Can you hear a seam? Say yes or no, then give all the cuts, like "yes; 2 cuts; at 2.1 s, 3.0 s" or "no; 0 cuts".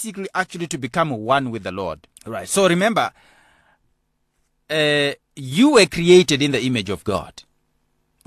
yes; 2 cuts; at 2.1 s, 5.2 s